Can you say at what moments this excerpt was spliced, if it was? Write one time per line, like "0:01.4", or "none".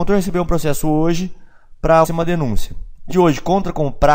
0:02.0
0:03.1